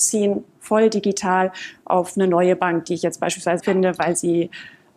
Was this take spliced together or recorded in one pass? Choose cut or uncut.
cut